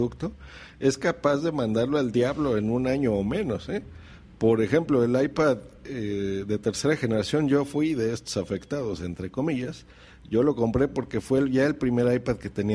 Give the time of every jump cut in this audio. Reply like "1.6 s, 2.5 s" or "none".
none